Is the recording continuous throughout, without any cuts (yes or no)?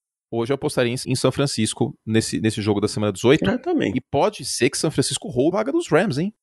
no